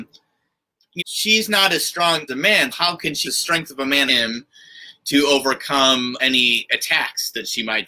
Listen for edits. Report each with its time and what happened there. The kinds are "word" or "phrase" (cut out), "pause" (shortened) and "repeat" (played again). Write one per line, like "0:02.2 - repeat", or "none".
0:01.0 - word
0:02.3 - word
0:02.7 - word
0:03.2 - word
0:04.1 - word
0:06.2 - word